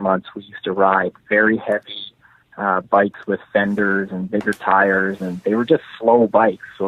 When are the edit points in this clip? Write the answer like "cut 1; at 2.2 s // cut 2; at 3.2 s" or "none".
none